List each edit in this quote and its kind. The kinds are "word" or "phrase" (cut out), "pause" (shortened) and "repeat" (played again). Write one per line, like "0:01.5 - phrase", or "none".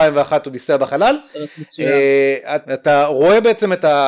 0:02.6 - pause